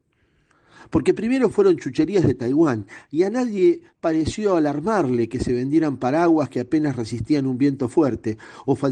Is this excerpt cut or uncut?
cut